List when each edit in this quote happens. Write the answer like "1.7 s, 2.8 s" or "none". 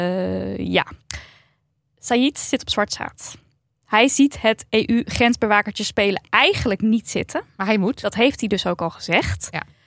none